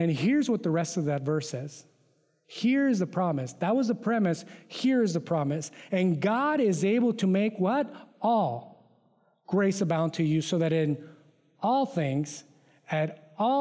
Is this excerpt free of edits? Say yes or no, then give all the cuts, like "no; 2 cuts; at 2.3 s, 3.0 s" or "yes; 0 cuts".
yes; 0 cuts